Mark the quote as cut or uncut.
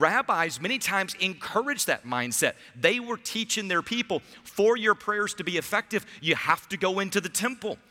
uncut